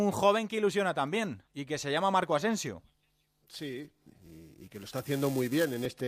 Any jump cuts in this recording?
yes; 1 cut; at 1.5 s

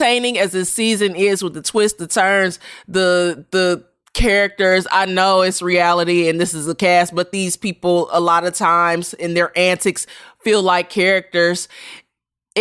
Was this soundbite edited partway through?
no; 0 cuts

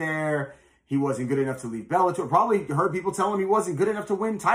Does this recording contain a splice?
no; 0 cuts

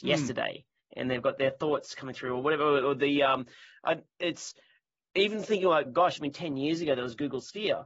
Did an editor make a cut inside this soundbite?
yes; 1 cut; at 5.8 s

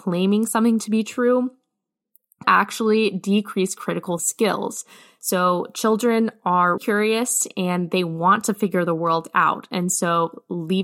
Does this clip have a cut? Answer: yes; 3 cuts; at 2.4 s, 4.2 s, 6.8 s

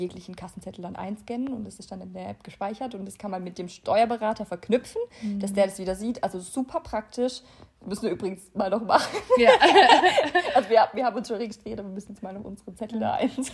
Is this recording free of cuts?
yes; 0 cuts

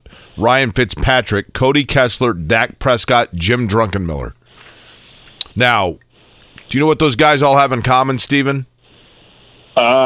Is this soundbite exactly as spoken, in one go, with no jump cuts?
yes; 0 cuts

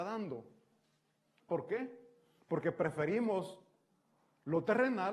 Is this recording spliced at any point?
no; 0 cuts

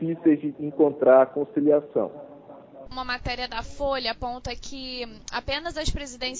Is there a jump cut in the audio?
no; 0 cuts

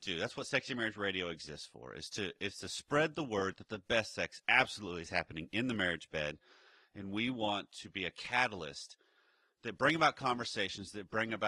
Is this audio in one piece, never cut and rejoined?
yes; 0 cuts

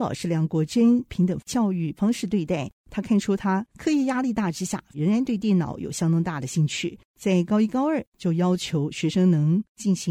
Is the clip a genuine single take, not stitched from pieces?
yes; 0 cuts

